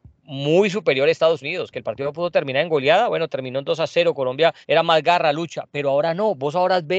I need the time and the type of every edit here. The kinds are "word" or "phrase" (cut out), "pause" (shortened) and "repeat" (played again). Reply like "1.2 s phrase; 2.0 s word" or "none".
4.6 s pause